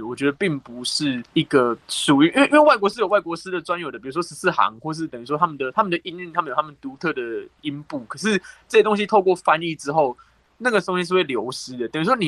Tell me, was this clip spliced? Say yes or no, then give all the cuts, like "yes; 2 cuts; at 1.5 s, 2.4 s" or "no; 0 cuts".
yes; 2 cuts; at 1.3 s, 1.8 s